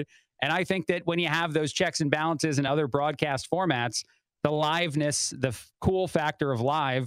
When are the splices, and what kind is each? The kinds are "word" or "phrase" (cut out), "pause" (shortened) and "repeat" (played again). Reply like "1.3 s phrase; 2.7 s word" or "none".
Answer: none